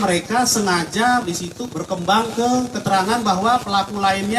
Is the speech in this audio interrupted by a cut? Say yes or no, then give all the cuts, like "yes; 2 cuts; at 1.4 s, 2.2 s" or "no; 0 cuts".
yes; 2 cuts; at 1.2 s, 1.7 s